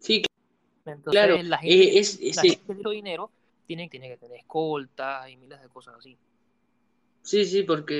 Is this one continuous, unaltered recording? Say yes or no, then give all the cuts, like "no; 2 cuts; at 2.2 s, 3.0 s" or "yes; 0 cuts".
no; 3 cuts; at 2.8 s, 3.5 s, 3.9 s